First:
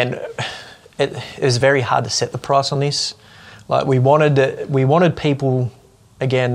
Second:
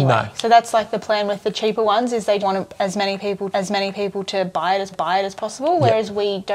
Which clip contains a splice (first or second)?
second